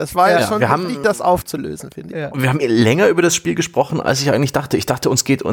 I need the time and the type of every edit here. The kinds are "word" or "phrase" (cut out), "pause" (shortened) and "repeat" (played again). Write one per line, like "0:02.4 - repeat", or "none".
0:02.6 - word